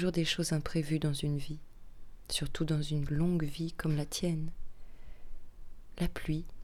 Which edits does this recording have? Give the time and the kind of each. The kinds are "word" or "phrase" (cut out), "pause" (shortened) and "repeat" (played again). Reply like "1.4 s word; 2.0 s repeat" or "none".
none